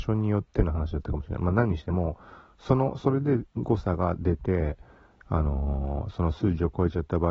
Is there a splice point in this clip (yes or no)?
no